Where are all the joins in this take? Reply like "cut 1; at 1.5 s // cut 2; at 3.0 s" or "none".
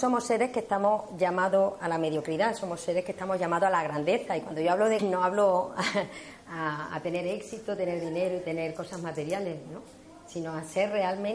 cut 1; at 5.0 s